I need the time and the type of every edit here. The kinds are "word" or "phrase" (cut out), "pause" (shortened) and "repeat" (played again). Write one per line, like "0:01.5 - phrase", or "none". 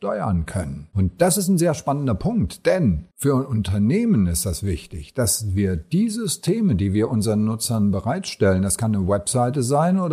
none